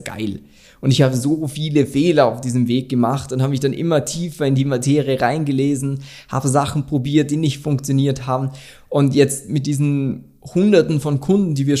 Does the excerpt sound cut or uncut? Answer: uncut